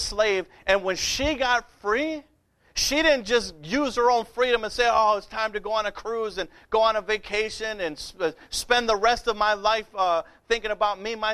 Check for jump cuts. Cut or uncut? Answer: uncut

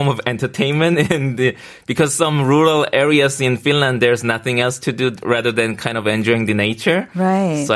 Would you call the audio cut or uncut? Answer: uncut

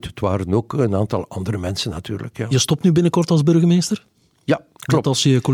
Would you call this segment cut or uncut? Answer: uncut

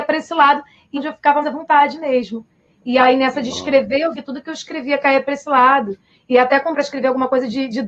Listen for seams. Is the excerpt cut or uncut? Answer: cut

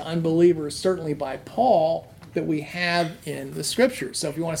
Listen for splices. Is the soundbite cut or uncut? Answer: uncut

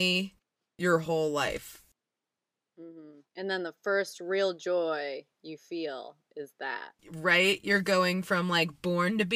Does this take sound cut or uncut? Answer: cut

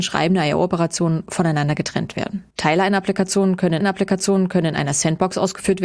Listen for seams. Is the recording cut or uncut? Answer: cut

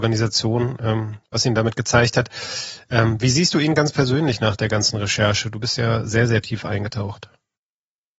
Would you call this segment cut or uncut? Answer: uncut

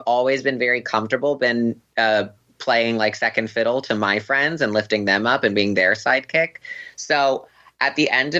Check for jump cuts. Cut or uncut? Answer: uncut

